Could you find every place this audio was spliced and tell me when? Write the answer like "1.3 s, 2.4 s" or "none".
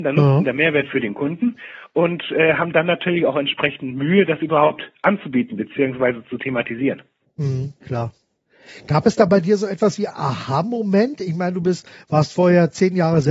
7.8 s, 10.1 s